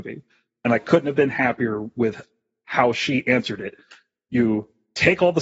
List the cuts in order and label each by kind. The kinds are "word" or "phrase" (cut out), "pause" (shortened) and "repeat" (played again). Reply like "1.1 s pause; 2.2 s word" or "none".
none